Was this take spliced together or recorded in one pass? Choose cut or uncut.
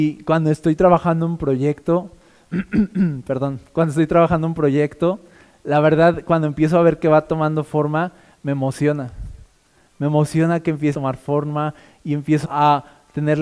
cut